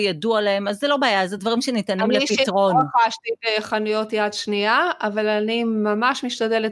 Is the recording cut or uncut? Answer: uncut